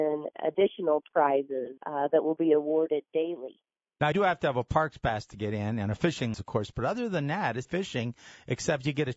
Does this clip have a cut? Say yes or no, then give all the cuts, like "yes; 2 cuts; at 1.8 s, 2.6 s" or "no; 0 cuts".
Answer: yes; 4 cuts; at 1.8 s, 4.1 s, 6.3 s, 7.6 s